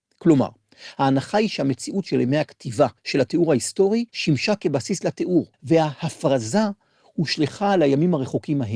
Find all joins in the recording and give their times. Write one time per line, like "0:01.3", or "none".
0:03.0
0:04.1
0:05.5